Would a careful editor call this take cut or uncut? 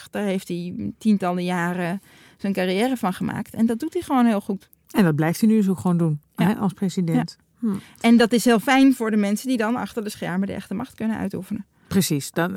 uncut